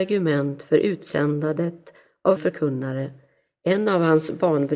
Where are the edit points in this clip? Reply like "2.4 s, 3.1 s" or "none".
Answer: 2.4 s

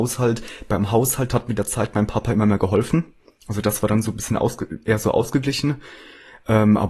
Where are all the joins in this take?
none

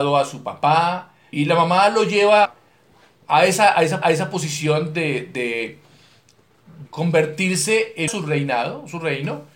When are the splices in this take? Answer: 1.3 s, 2.4 s, 4.0 s, 6.9 s, 8.1 s

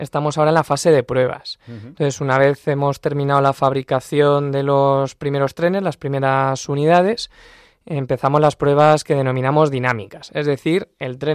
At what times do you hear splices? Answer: none

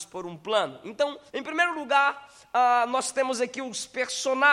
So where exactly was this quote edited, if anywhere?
1.3 s

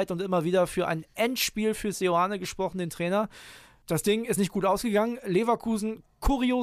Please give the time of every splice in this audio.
none

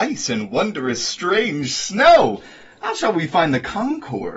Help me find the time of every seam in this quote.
none

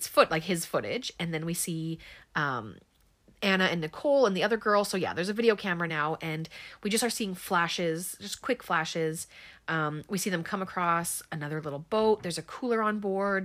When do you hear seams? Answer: none

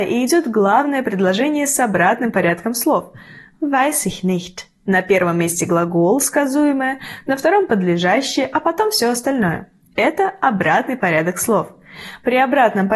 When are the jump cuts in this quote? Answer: none

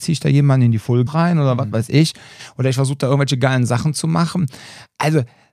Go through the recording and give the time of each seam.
1.1 s

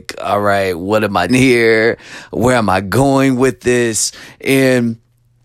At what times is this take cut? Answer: 1.3 s

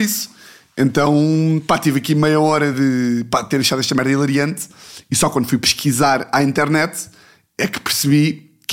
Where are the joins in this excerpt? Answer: none

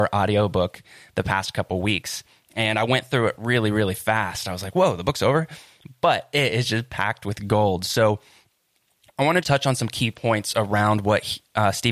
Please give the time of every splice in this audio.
9.4 s

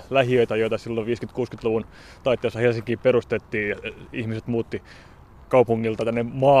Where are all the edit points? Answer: none

